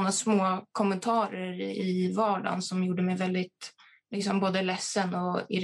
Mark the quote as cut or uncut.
uncut